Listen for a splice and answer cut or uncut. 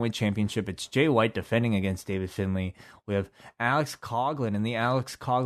uncut